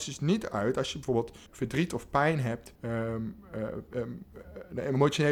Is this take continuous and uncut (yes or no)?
no